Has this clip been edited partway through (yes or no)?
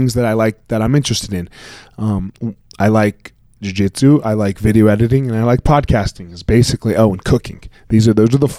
no